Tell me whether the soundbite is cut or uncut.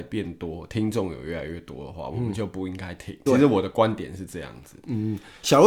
cut